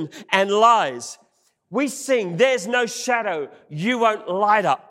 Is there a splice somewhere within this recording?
no; 0 cuts

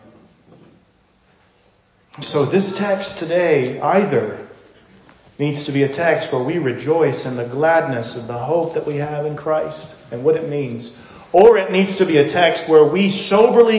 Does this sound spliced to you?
no; 0 cuts

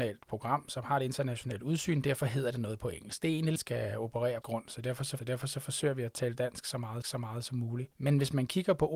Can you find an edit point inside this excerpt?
yes; 5 cuts; at 3.6 s, 4.4 s, 5.2 s, 7.0 s, 7.9 s

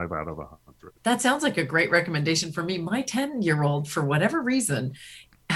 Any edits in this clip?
yes; 1 cut; at 1.0 s

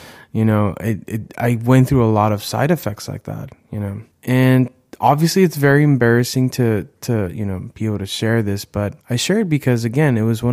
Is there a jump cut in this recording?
yes; 2 cuts; at 4.1 s, 9.0 s

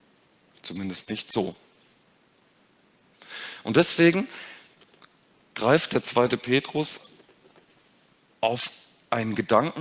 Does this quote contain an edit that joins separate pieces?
no; 0 cuts

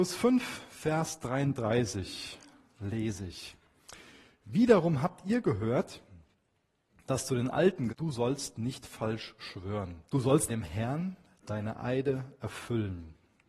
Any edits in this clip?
yes; 3 cuts; at 7.9 s, 10.1 s, 10.5 s

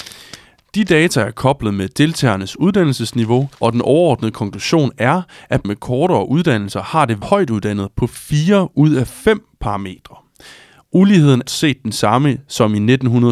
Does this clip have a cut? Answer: yes; 4 cuts; at 3.5 s, 5.6 s, 7.2 s, 11.5 s

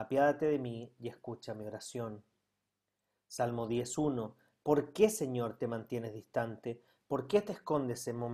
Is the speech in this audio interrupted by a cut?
no; 0 cuts

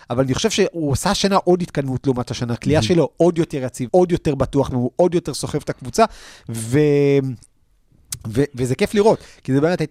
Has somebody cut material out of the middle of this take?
yes; 3 cuts; at 2.6 s, 3.9 s, 4.7 s

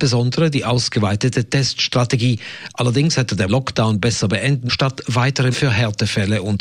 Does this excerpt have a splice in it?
yes; 3 cuts; at 3.5 s, 4.7 s, 5.5 s

